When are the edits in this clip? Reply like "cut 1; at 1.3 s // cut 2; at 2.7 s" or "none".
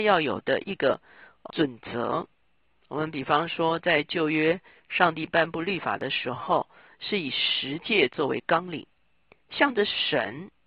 cut 1; at 1.5 s